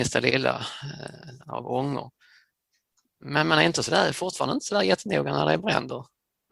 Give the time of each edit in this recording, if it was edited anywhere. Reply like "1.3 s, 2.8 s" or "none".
none